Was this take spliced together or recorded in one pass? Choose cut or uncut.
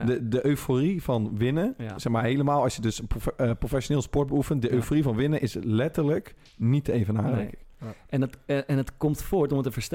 uncut